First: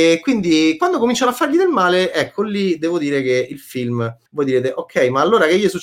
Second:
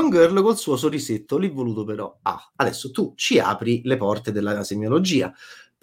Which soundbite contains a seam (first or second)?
first